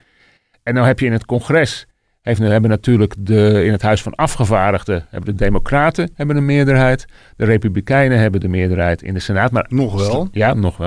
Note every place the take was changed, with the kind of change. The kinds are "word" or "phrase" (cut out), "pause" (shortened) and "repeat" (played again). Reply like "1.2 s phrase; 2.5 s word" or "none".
none